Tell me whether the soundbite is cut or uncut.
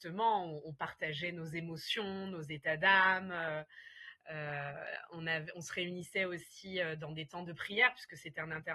uncut